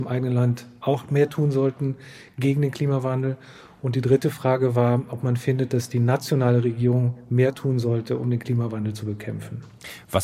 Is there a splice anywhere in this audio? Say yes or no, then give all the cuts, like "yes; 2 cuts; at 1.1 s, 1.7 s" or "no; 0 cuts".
no; 0 cuts